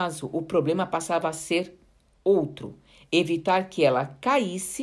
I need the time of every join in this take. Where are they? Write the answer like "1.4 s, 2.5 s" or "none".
none